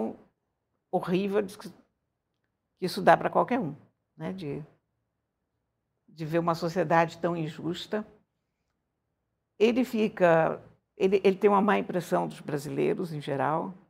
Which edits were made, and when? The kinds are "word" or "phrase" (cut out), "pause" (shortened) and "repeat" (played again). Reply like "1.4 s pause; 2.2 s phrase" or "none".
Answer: none